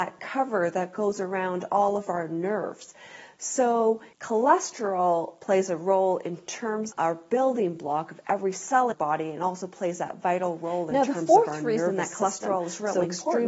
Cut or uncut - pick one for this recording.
cut